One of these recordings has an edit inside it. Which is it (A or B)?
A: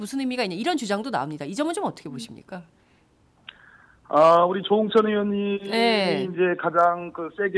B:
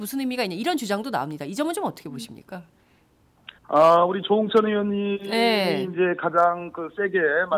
B